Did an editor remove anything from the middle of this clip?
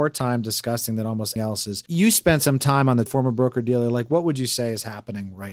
yes; 3 cuts; at 1.4 s, 1.9 s, 3.1 s

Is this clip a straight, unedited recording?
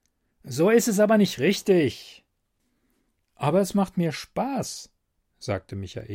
yes; 0 cuts

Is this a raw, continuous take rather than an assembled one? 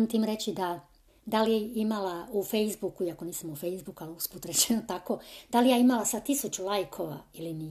no; 1 cut; at 1.1 s

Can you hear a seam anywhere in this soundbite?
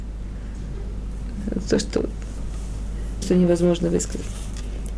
yes; 1 cut; at 3.2 s

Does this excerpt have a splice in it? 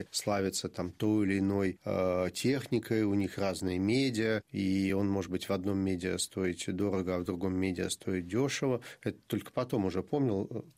no; 0 cuts

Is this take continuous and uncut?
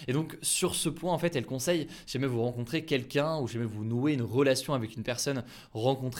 yes; 0 cuts

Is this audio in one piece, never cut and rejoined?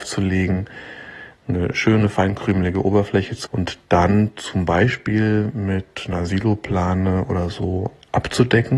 no; 1 cut; at 3.5 s

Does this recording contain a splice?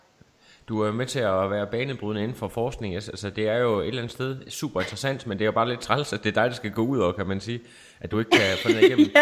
no; 0 cuts

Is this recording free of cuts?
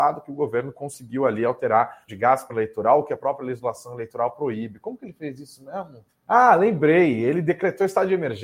no; 3 cuts; at 2.1 s, 2.5 s, 6.1 s

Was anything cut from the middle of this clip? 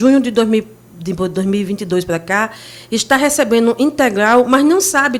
no; 0 cuts

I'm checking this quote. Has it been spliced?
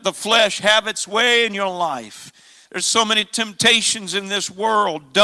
no; 0 cuts

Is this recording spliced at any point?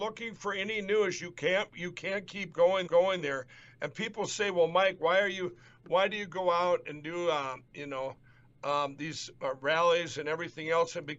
yes; 1 cut; at 2.9 s

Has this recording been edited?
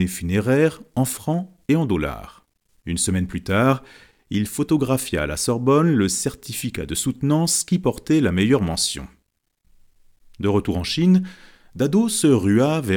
no; 0 cuts

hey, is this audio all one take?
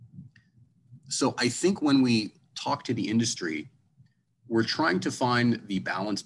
yes; 0 cuts

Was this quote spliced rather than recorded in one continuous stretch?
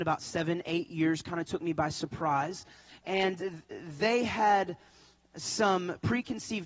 yes; 1 cut; at 3.4 s

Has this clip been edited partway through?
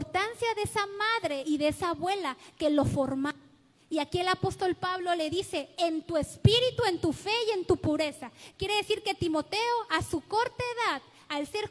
no; 0 cuts

